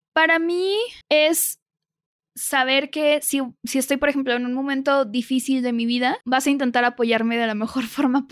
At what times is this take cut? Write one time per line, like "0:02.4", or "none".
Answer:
0:01.0
0:06.2